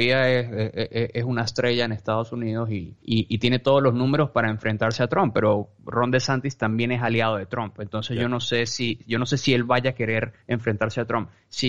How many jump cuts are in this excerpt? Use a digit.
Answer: 2